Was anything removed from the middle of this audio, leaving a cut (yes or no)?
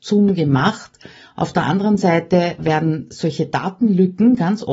yes